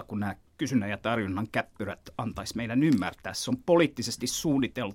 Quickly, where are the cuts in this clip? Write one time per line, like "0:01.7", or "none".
none